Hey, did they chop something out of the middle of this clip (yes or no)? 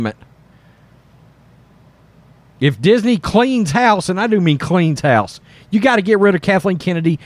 no